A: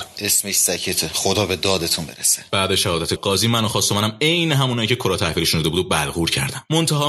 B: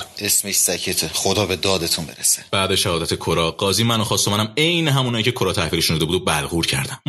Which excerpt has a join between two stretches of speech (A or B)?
A